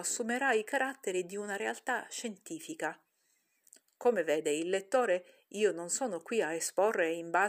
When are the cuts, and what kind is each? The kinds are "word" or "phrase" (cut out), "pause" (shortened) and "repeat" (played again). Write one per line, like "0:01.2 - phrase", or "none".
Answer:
none